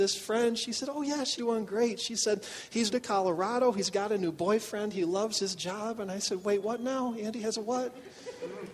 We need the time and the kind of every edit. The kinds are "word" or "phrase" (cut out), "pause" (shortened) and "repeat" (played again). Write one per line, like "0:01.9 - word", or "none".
0:01.4 - phrase
0:02.9 - word